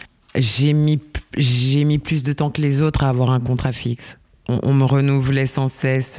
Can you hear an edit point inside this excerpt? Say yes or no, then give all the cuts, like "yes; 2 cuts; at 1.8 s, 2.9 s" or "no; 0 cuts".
no; 0 cuts